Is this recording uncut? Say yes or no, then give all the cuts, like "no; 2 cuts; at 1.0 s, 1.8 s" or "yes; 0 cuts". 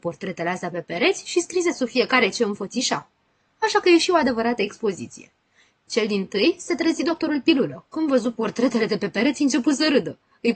yes; 0 cuts